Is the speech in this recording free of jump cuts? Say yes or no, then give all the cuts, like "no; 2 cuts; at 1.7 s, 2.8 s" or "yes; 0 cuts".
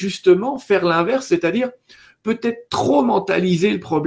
yes; 0 cuts